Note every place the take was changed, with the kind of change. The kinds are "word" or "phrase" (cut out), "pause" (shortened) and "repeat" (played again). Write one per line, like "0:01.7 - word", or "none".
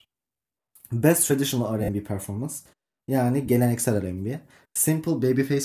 none